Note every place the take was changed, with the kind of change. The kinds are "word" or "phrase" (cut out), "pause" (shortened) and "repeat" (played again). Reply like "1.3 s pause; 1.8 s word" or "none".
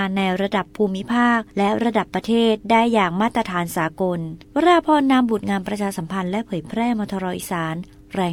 4.4 s pause